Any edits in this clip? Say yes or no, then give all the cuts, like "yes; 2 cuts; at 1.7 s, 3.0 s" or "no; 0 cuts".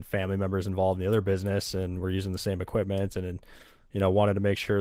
no; 0 cuts